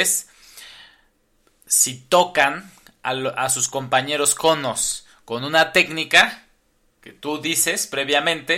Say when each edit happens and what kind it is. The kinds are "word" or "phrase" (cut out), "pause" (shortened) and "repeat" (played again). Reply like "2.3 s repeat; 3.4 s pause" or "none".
none